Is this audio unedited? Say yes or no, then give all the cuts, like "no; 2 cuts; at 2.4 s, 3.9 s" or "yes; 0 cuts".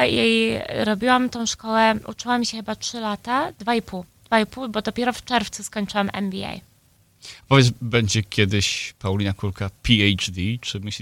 yes; 0 cuts